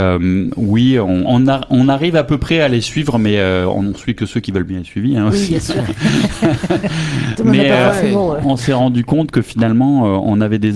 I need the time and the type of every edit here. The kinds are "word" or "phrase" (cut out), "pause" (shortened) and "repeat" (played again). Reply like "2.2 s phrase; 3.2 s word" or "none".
1.3 s word